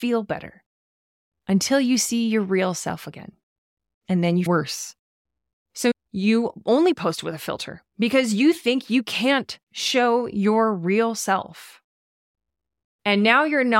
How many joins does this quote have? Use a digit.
2